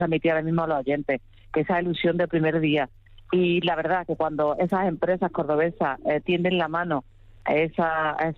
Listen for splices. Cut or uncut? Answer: uncut